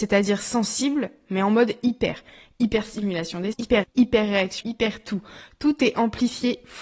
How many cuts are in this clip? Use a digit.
3